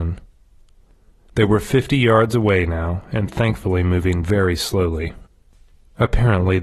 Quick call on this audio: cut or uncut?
uncut